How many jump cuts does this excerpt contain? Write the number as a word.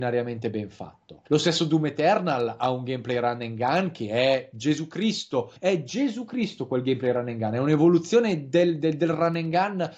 two